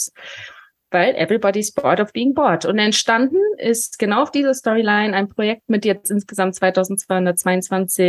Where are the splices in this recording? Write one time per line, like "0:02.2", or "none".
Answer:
none